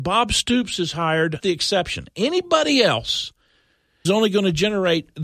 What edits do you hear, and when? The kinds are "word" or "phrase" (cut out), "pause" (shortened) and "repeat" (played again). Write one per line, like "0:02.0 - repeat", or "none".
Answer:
0:01.4 - word
0:04.1 - word